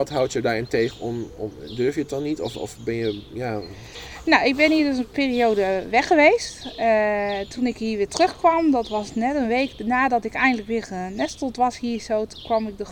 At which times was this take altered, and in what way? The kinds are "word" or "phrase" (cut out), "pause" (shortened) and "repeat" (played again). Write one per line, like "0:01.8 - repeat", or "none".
none